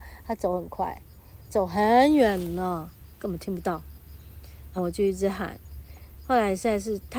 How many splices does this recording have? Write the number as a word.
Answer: two